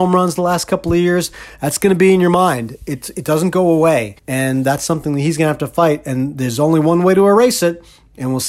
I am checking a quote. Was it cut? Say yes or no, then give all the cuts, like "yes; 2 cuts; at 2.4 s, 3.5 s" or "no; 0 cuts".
yes; 1 cut; at 4.2 s